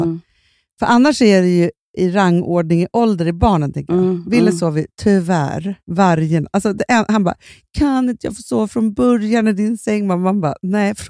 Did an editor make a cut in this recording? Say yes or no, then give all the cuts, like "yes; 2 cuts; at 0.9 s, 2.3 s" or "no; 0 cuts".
yes; 1 cut; at 5.8 s